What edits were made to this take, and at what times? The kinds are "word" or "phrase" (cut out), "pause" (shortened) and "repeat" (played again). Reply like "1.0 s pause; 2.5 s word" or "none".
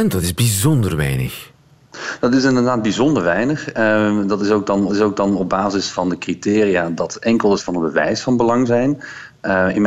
4.9 s repeat; 7.6 s word; 8.7 s word

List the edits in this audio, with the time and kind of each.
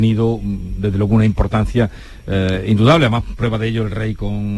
none

